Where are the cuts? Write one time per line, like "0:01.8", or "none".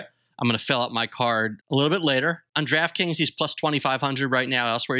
none